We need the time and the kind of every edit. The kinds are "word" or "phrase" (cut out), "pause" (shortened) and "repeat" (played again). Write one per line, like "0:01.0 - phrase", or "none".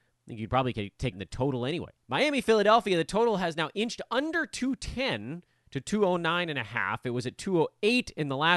0:01.1 - phrase
0:02.0 - pause